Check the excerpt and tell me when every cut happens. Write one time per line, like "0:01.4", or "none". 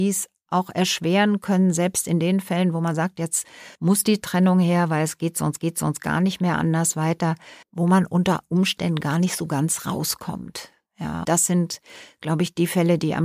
0:03.7
0:05.6
0:07.6
0:11.2